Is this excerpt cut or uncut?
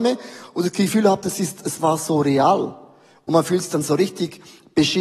uncut